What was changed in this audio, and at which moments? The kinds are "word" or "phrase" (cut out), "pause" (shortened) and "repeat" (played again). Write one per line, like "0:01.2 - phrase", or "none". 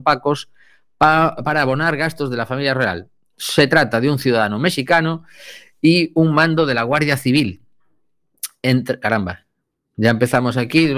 none